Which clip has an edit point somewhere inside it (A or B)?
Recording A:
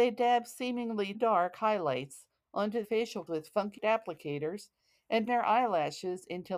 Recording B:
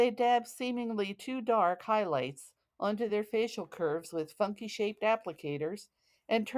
A